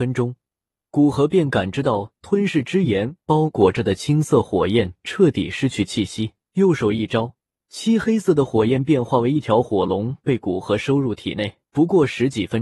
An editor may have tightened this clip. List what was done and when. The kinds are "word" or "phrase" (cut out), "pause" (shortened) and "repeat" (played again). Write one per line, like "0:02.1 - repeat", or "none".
0:06.4 - pause
0:07.6 - pause
0:11.7 - pause